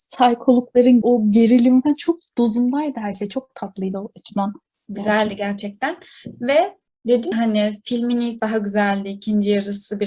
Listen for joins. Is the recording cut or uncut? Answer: cut